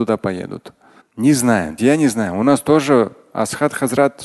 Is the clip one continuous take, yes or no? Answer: no